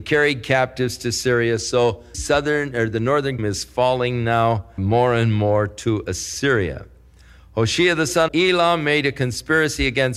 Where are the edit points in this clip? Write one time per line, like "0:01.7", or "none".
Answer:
0:02.1
0:03.4
0:04.8
0:08.3